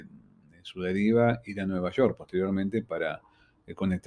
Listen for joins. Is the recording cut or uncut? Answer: uncut